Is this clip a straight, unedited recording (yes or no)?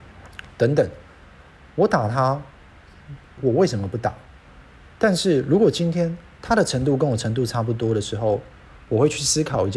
no